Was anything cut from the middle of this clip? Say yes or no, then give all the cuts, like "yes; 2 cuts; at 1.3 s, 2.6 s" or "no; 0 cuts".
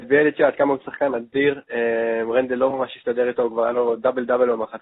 no; 0 cuts